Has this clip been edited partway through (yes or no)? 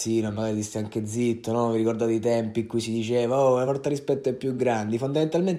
no